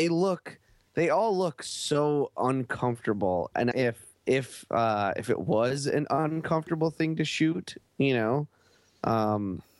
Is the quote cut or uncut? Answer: cut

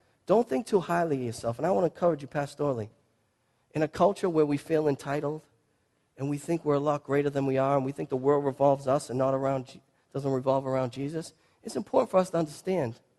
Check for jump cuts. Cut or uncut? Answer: uncut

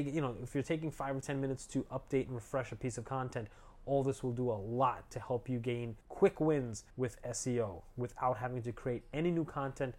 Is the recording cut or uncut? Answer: cut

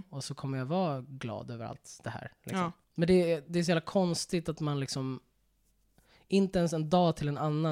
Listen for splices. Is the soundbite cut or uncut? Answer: uncut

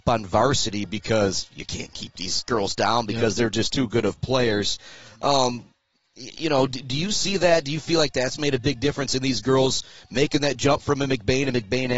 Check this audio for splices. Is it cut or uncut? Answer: uncut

